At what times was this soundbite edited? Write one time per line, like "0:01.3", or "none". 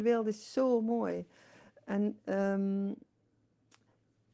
none